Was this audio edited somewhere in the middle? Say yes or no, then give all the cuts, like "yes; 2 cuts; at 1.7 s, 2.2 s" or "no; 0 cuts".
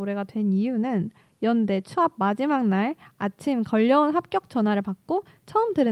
no; 0 cuts